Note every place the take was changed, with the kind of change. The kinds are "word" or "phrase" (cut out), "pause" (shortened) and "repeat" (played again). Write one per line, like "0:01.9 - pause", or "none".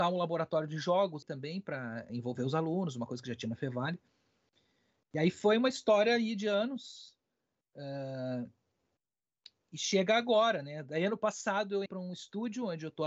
0:01.2 - word
0:02.1 - word
0:11.9 - word